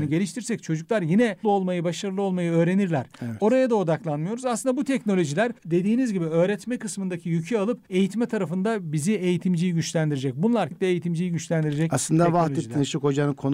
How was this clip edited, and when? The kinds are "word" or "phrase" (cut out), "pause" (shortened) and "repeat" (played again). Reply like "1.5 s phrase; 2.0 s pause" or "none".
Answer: 1.4 s word; 5.6 s pause; 7.9 s pause; 10.7 s word